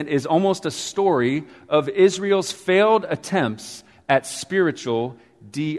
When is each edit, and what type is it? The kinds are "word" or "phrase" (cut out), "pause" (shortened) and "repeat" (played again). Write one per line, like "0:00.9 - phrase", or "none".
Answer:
none